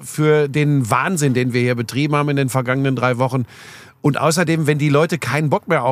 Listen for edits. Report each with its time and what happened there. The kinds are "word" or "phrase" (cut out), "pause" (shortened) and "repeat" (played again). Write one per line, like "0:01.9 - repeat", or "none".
none